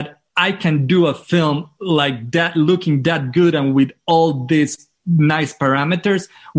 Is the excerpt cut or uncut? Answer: uncut